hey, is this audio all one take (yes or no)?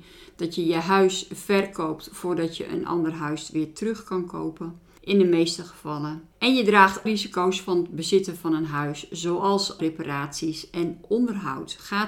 no